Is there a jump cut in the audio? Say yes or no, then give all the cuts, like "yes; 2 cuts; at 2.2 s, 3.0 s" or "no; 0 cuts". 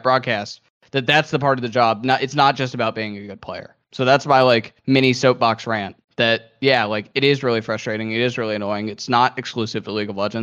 yes; 3 cuts; at 3.8 s, 4.8 s, 6.0 s